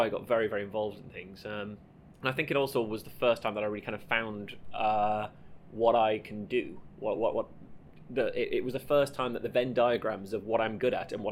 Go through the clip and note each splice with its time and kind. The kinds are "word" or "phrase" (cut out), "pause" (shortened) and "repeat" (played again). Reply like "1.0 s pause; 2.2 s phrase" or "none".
2.1 s pause